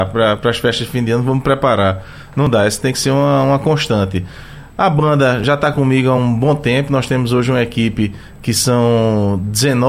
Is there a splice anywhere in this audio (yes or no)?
no